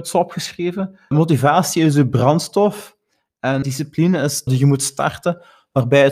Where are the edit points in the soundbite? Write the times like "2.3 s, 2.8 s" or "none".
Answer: 1.1 s, 3.6 s, 4.5 s